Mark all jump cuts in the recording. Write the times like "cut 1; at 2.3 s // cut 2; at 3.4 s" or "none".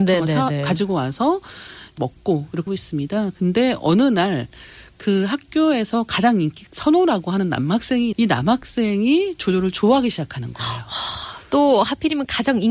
cut 1; at 2.0 s // cut 2; at 2.7 s // cut 3; at 6.7 s // cut 4; at 8.1 s

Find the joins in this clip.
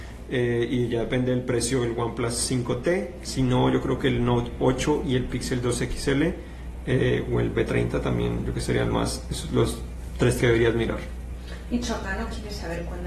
cut 1; at 8.5 s // cut 2; at 8.9 s // cut 3; at 10.4 s

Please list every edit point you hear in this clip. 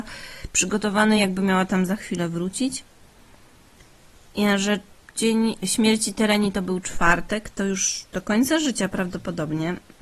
none

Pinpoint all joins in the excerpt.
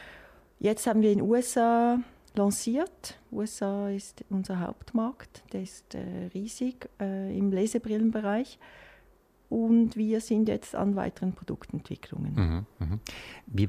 none

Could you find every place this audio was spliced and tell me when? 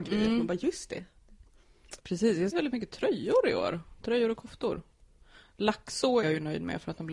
cut 1; at 2.0 s // cut 2; at 2.5 s // cut 3; at 6.2 s

